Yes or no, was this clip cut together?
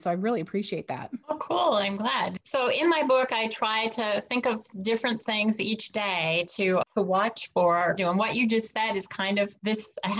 yes